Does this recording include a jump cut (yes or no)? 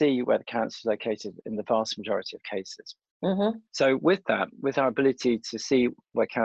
yes